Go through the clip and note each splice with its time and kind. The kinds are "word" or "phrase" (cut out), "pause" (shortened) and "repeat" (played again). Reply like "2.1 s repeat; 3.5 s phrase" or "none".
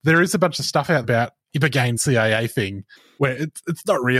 1.0 s word; 2.0 s phrase; 3.0 s pause

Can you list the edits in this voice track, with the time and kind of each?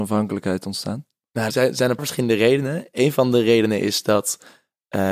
1.5 s word; 2.0 s word

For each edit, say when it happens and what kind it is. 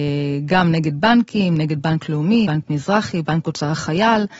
2.4 s word

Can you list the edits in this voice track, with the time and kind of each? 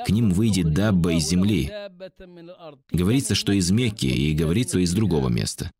2.8 s pause; 4.7 s word

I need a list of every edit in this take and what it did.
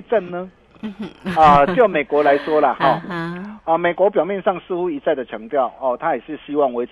none

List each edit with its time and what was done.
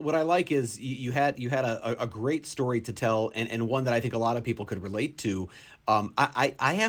none

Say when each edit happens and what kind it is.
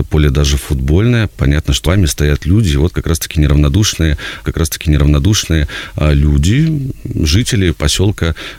1.8 s word; 4.4 s repeat

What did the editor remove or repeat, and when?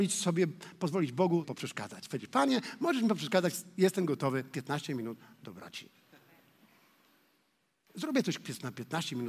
1.4 s word

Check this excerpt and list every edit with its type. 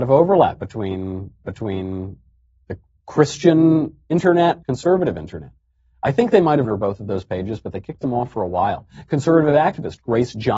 1.4 s repeat; 4.6 s word; 6.6 s phrase

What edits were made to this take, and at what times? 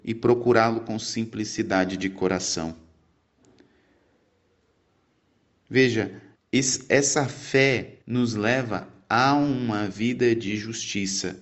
6.4 s pause; 8.0 s pause

